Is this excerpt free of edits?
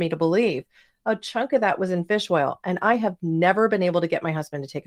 yes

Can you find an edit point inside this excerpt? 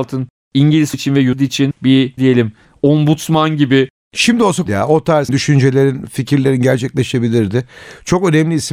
yes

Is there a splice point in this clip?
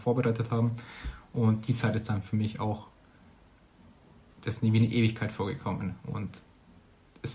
no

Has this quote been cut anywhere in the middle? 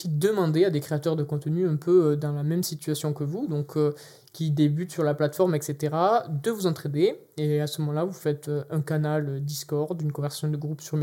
no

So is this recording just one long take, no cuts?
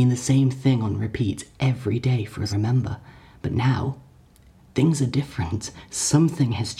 no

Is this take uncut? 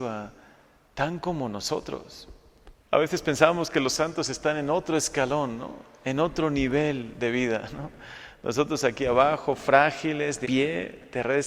no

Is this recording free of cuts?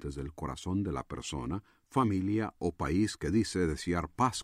yes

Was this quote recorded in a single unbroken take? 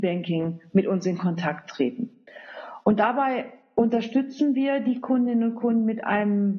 yes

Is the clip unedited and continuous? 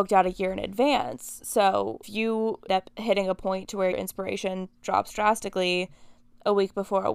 no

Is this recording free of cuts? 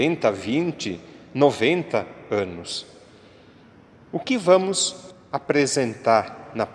yes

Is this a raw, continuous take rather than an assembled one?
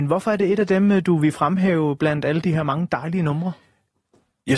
yes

